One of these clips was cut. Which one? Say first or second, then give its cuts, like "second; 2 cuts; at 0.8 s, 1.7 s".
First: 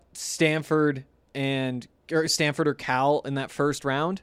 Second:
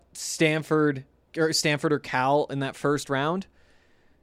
second; 1 cut; at 1.3 s